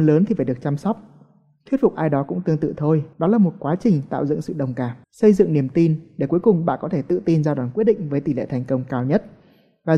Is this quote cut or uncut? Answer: cut